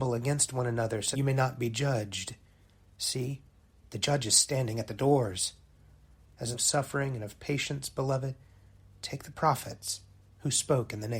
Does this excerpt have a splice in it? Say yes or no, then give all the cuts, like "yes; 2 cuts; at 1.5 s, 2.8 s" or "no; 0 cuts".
yes; 2 cuts; at 1.1 s, 6.5 s